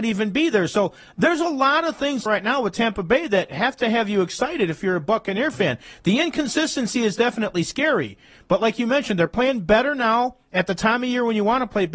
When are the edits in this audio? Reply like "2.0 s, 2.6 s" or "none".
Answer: 2.3 s